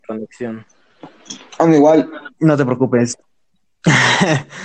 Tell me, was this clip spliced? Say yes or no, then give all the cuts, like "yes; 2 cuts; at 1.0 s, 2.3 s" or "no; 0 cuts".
yes; 1 cut; at 2.3 s